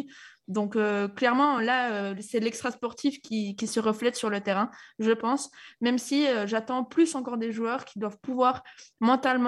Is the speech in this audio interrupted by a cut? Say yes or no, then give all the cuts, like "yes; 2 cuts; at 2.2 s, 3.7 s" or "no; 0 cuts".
no; 0 cuts